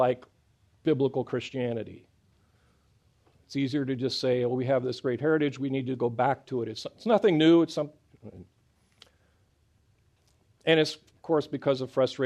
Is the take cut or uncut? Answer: uncut